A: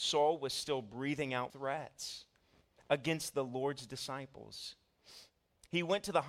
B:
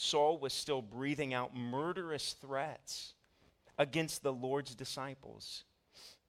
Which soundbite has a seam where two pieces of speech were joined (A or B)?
A